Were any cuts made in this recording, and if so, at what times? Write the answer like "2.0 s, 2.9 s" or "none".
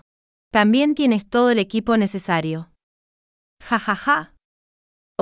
none